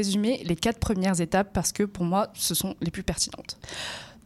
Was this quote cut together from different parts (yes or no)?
no